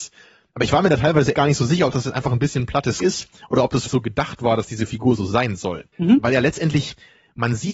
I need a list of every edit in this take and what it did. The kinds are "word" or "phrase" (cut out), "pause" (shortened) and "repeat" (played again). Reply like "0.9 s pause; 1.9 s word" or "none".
1.3 s word; 3.0 s word; 3.9 s word; 5.9 s pause